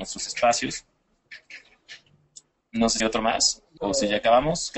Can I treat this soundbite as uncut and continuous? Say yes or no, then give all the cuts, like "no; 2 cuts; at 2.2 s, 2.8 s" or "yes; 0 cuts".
no; 2 cuts; at 3.0 s, 3.8 s